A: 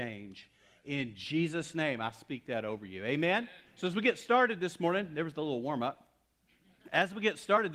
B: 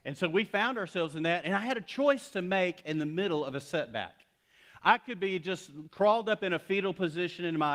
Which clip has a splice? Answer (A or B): A